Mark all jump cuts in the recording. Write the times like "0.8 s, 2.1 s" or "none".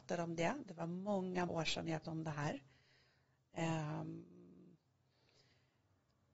1.5 s, 2.0 s